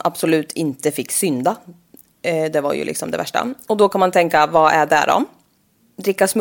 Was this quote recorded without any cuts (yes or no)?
yes